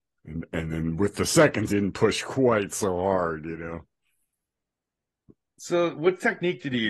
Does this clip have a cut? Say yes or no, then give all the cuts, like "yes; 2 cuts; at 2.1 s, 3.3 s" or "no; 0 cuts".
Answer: yes; 1 cut; at 1.7 s